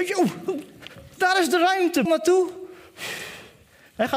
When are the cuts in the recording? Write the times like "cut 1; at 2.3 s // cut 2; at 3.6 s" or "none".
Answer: cut 1; at 2.1 s